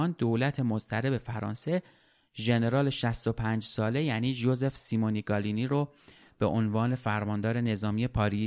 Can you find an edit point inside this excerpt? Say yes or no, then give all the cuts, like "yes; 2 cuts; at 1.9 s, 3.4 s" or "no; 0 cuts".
no; 0 cuts